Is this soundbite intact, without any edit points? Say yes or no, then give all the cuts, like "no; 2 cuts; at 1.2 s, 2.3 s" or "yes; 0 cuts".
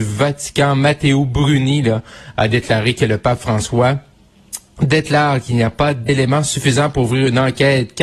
yes; 0 cuts